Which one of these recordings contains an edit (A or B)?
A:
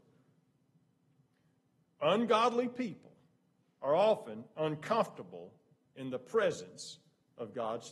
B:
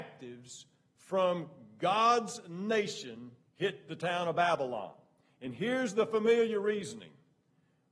B